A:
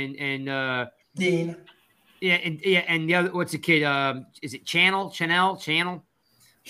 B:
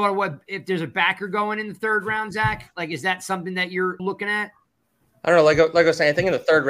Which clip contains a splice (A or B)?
B